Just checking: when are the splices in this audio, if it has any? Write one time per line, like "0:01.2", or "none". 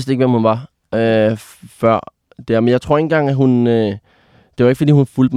none